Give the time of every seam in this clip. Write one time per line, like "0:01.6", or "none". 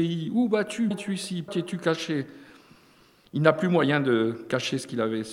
0:00.9
0:01.5